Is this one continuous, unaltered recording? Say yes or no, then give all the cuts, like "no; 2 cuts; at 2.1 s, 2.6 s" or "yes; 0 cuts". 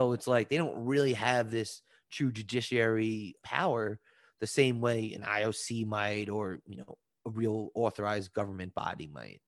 no; 1 cut; at 3.4 s